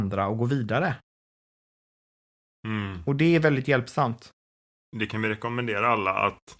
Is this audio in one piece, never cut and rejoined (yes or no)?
yes